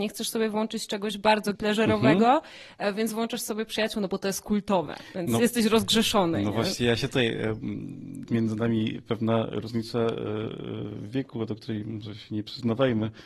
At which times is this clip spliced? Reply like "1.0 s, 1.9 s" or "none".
1.5 s, 8.3 s

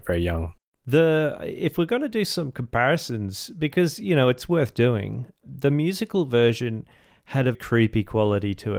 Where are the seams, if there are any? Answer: 7.5 s

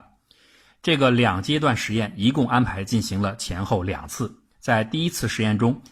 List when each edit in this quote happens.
none

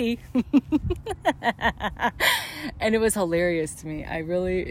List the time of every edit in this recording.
none

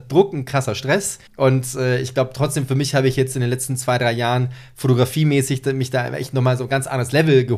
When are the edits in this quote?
1.3 s

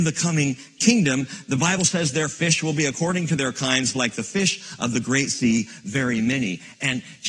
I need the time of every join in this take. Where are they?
none

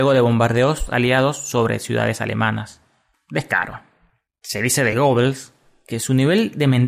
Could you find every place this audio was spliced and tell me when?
none

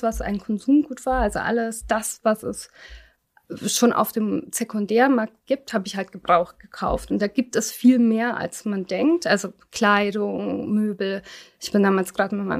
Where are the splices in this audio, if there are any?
none

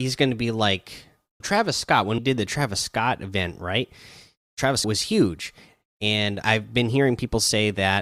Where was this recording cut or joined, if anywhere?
1.4 s, 2.2 s, 4.8 s, 6.4 s

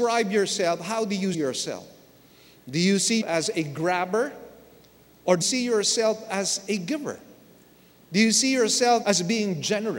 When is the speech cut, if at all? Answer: 1.3 s, 3.2 s, 5.4 s, 9.0 s

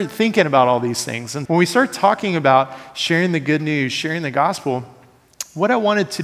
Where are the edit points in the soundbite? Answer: 1.4 s

